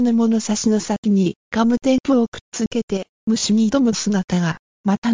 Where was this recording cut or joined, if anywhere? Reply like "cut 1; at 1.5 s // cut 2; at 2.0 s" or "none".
cut 1; at 1.4 s